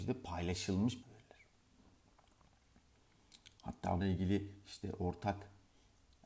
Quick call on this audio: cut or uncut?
cut